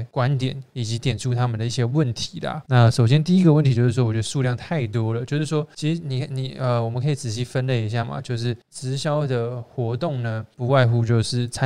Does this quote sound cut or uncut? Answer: cut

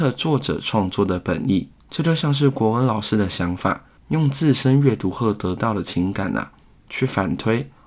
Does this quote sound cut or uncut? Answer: cut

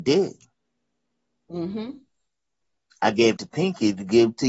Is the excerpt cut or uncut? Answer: cut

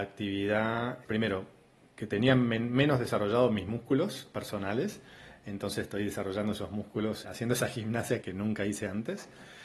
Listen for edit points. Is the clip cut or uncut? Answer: cut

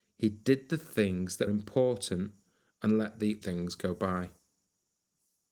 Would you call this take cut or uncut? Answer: cut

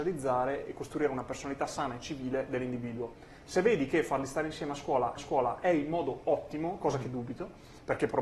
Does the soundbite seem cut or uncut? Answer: cut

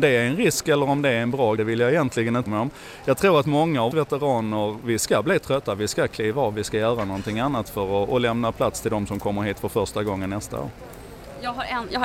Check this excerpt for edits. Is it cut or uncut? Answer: cut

